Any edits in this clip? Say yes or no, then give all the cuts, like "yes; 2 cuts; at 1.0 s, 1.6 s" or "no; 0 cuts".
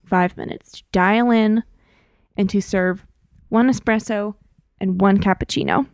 no; 0 cuts